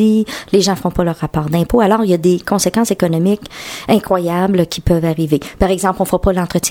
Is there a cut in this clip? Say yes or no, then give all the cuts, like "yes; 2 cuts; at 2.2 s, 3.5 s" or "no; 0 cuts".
no; 0 cuts